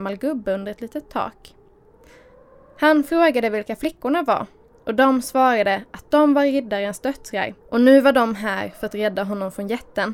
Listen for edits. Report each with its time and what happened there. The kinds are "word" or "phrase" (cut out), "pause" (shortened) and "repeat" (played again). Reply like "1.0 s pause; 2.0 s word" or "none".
7.6 s pause